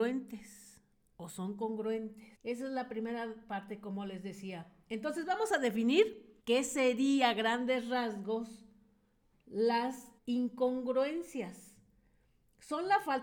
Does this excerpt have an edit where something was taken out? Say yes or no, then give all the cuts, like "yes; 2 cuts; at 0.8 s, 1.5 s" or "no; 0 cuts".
yes; 3 cuts; at 2.3 s, 6.4 s, 10.2 s